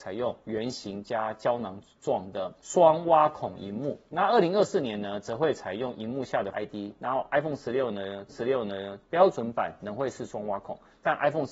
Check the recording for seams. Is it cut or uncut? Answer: cut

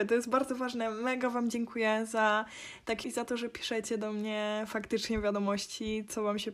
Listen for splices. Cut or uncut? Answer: cut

